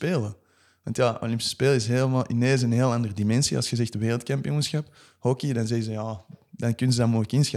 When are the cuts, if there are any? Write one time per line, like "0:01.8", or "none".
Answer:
none